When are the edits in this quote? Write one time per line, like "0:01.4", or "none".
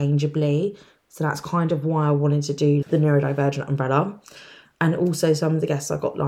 0:02.8